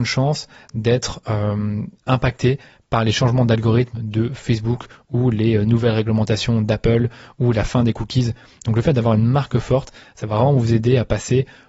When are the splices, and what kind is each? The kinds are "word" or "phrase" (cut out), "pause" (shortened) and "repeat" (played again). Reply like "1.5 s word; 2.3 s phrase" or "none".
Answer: none